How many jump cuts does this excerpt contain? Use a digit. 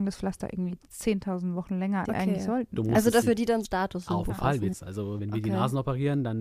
6